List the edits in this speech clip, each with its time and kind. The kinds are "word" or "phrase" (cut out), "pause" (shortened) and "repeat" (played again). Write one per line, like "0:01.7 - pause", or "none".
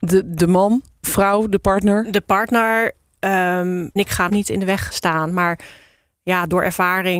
0:01.0 - word
0:04.0 - word
0:04.3 - word
0:04.9 - word